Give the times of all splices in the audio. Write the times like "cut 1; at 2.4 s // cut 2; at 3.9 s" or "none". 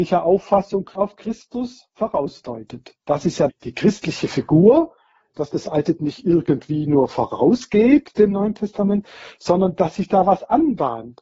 cut 1; at 0.9 s // cut 2; at 3.5 s // cut 3; at 6.0 s